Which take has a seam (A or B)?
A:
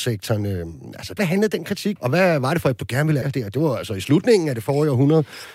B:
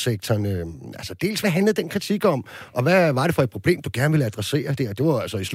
A